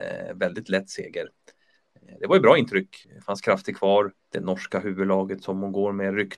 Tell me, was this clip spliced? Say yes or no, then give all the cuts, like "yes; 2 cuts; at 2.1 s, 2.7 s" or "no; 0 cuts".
yes; 2 cuts; at 3.0 s, 4.2 s